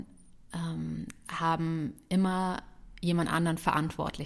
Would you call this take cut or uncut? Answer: uncut